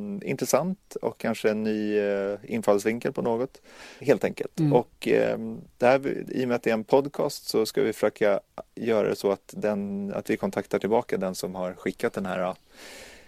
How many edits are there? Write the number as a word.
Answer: one